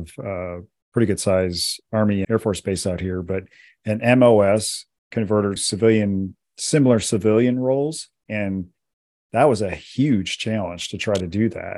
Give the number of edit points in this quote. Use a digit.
2